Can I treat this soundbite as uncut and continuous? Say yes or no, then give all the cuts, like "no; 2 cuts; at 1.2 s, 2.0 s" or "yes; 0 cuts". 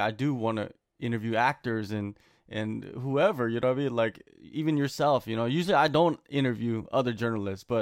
yes; 0 cuts